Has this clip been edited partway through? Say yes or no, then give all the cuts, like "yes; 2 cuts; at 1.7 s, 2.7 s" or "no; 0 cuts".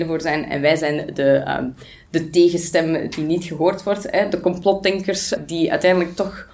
no; 0 cuts